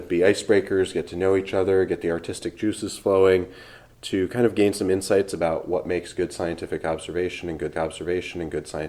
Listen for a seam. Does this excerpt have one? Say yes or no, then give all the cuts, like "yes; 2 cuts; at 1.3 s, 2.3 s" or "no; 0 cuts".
yes; 1 cut; at 7.7 s